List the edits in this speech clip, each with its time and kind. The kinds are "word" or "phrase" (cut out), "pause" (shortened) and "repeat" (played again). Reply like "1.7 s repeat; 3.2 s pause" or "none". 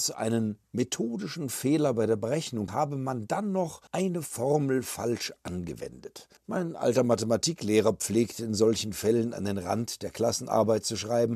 2.7 s phrase; 3.9 s pause; 6.4 s pause